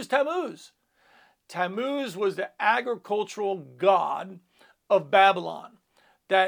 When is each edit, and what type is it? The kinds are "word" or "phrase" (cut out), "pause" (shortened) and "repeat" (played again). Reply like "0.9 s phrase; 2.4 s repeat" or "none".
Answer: none